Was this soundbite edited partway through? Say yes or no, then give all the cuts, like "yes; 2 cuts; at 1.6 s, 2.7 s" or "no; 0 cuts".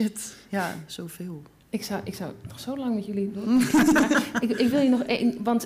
no; 0 cuts